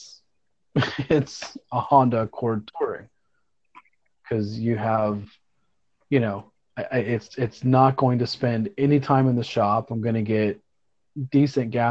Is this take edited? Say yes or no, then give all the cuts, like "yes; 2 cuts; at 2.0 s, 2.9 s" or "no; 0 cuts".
no; 0 cuts